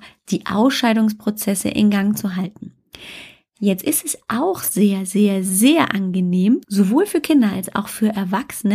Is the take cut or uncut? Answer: cut